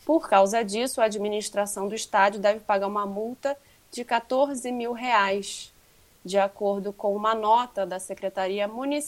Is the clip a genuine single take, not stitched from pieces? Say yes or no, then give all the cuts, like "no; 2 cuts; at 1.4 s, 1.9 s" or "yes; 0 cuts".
yes; 0 cuts